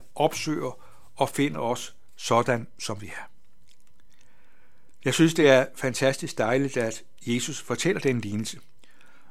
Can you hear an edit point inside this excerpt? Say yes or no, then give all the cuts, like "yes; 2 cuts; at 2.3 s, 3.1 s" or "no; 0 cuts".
no; 0 cuts